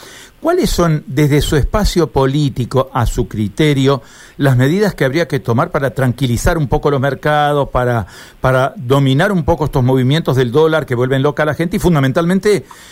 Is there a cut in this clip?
no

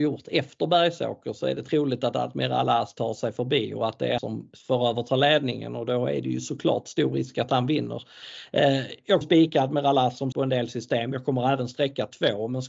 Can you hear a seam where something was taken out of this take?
yes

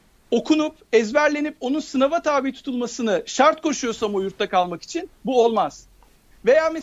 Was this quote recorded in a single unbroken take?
yes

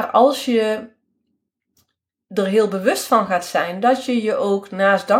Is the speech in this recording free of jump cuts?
yes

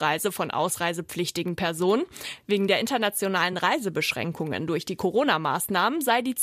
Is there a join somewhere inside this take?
no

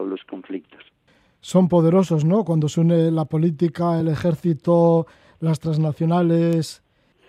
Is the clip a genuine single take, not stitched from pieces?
yes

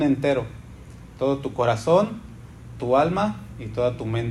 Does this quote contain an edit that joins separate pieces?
yes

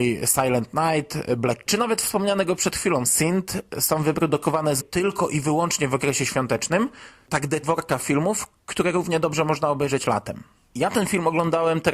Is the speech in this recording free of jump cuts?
no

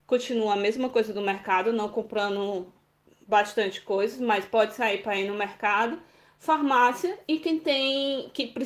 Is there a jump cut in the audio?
no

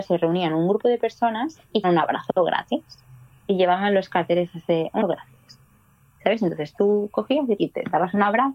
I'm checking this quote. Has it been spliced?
yes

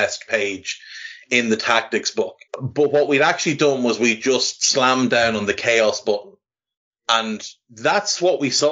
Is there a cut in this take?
yes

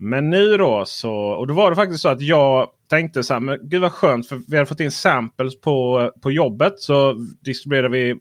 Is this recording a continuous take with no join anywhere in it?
yes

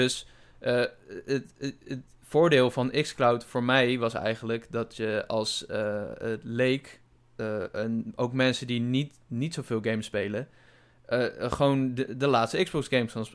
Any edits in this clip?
no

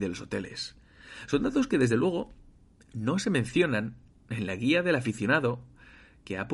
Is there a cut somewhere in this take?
no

